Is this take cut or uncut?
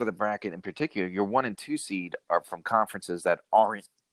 uncut